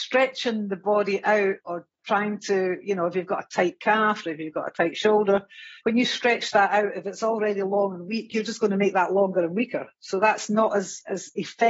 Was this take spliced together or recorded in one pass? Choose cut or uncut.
cut